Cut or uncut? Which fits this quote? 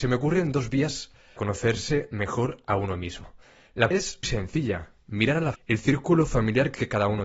cut